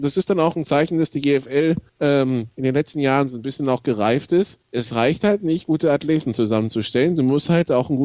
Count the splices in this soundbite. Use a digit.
2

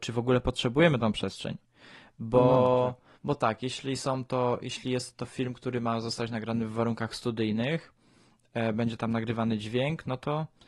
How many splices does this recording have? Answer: 1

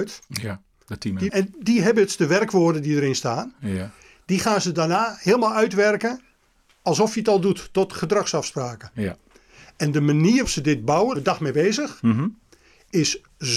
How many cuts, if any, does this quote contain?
3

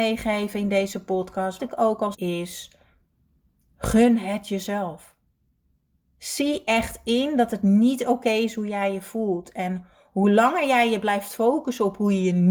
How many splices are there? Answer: 2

